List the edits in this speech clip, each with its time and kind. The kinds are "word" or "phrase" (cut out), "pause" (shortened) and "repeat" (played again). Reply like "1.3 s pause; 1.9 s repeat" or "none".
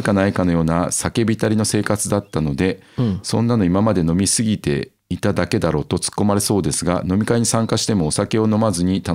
5.0 s pause